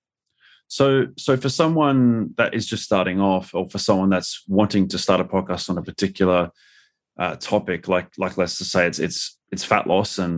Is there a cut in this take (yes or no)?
no